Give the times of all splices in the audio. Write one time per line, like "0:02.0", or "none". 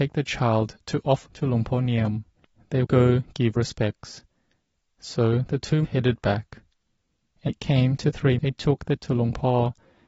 0:01.3
0:02.8
0:03.6
0:05.8
0:07.5
0:08.4
0:09.0